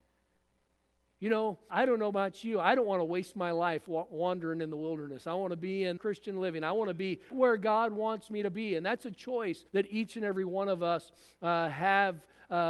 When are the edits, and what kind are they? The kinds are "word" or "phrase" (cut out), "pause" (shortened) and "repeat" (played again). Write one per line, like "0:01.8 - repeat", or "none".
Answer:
0:01.7 - word
0:06.0 - phrase
0:07.3 - word
0:09.7 - pause

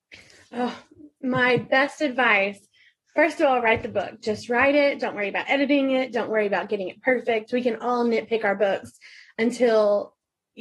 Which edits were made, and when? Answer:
none

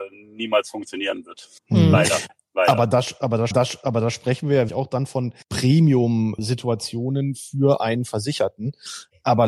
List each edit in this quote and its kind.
0:01.6 - pause
0:03.5 - repeat
0:04.7 - word
0:05.4 - pause

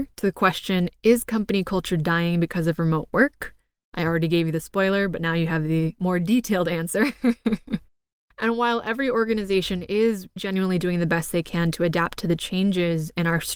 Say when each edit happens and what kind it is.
0:10.4 - word

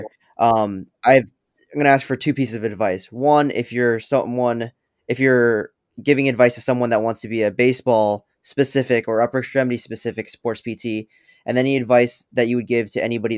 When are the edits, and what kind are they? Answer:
none

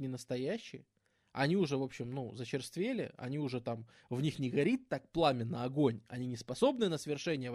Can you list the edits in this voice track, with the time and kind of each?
none

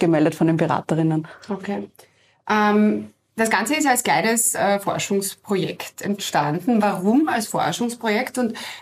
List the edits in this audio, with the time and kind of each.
none

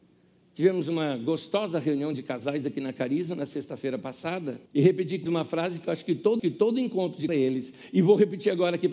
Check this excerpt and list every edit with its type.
0:04.7 - pause
0:05.3 - word
0:06.4 - repeat
0:07.3 - phrase

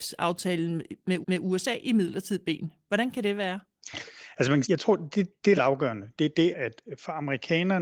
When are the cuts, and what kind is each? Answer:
0:01.2 - repeat
0:04.6 - phrase
0:05.6 - phrase
0:06.5 - word

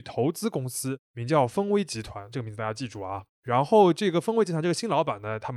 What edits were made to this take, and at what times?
0:03.3 - pause

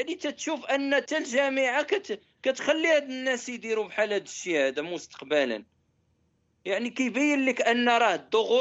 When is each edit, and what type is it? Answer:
none

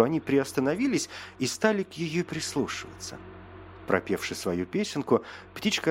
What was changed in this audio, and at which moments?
0:02.3 - word

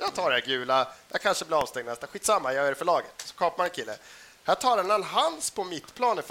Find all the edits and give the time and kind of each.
none

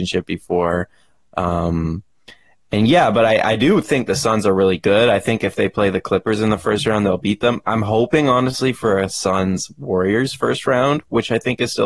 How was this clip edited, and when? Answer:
none

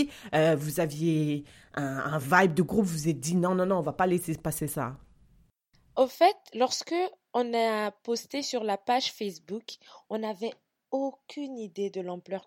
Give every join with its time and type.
none

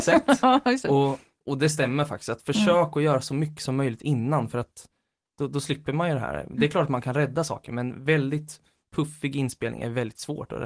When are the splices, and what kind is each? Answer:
none

